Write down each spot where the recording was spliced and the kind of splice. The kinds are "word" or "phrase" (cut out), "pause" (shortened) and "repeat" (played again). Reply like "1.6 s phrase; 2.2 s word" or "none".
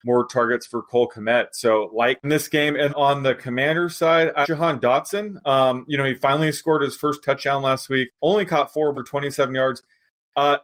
2.2 s phrase; 2.9 s word; 4.4 s word; 8.1 s pause; 8.9 s word